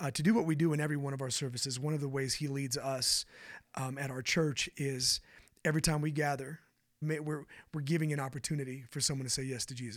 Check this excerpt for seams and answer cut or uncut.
cut